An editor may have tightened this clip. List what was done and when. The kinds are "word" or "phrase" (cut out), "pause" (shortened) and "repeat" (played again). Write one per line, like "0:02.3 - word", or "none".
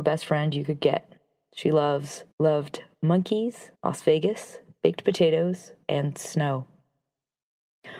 0:02.3 - pause
0:03.7 - pause